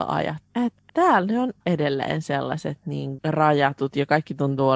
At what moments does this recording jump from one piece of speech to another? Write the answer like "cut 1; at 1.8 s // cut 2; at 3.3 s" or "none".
cut 1; at 1.6 s // cut 2; at 3.2 s